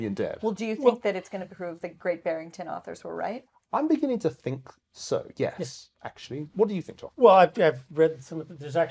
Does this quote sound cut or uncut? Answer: uncut